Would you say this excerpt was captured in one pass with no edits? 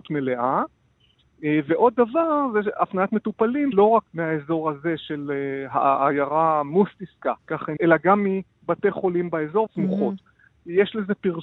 no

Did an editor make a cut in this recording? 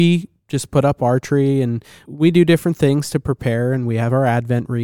yes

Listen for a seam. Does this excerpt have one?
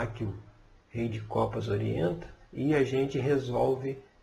yes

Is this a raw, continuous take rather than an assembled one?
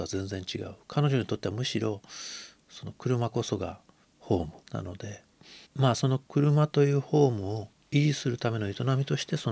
no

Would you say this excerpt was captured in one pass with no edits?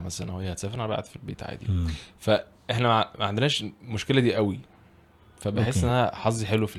yes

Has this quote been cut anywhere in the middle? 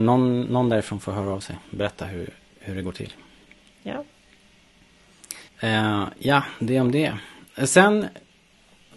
yes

